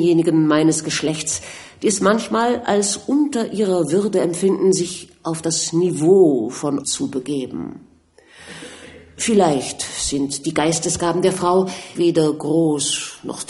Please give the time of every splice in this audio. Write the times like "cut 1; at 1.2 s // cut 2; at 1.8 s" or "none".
cut 1; at 6.8 s // cut 2; at 12.0 s